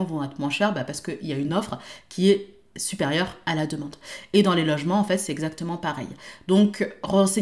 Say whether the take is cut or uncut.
uncut